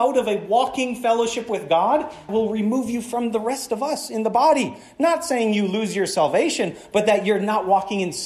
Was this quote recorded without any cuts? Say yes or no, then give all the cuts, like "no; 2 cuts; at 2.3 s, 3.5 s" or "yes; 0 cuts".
no; 1 cut; at 2.3 s